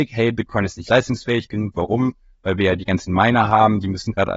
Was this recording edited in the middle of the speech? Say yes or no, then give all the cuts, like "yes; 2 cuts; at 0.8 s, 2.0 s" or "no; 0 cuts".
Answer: no; 0 cuts